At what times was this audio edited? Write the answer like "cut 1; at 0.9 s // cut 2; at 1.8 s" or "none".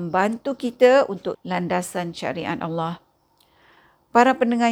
cut 1; at 1.3 s